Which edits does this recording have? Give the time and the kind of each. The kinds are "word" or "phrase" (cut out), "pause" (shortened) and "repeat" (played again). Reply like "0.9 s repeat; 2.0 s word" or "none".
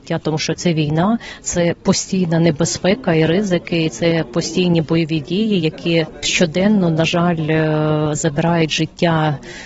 none